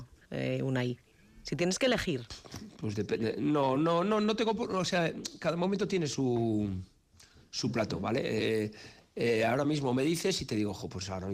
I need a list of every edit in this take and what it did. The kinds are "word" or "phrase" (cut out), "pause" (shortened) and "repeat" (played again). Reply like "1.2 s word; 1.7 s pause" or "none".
none